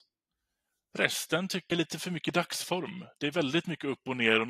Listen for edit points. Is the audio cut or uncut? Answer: cut